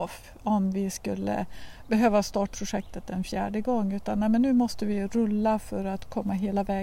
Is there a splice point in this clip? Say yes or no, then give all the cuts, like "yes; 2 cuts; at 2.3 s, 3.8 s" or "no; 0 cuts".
yes; 1 cut; at 2.5 s